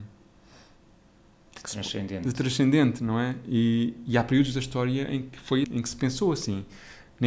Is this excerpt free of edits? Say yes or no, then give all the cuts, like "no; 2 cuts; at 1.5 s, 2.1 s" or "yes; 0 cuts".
no; 1 cut; at 5.6 s